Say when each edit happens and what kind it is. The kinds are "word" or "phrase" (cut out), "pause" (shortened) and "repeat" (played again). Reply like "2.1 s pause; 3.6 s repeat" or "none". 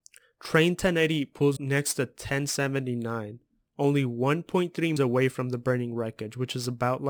1.6 s word; 5.0 s word